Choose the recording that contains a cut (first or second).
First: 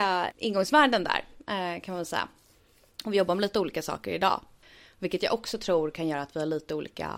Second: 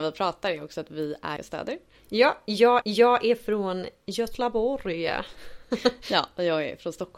second